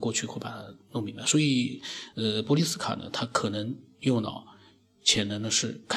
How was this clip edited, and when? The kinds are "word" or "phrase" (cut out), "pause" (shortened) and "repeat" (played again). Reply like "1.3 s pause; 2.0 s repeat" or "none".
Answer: none